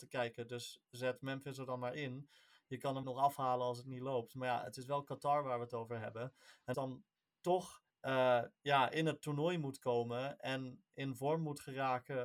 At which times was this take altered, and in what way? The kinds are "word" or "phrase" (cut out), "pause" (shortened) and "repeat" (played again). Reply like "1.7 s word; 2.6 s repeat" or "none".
3.0 s word; 6.7 s phrase; 7.9 s pause